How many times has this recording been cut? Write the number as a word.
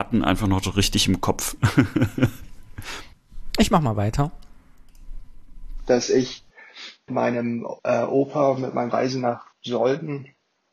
three